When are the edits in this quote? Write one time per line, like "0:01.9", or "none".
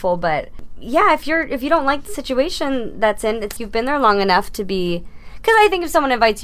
0:03.6